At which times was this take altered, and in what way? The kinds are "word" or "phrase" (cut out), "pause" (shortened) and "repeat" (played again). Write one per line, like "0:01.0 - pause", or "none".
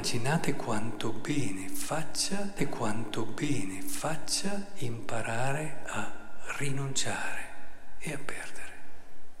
0:02.6 - repeat